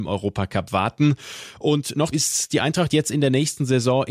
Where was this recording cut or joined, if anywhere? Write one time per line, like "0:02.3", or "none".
0:02.1